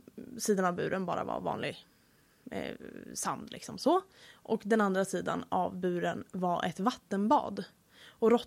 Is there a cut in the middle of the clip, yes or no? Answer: no